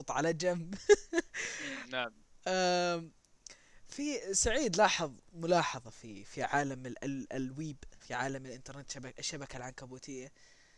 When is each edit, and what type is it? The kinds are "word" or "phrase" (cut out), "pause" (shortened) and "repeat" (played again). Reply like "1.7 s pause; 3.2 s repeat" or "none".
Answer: 8.0 s pause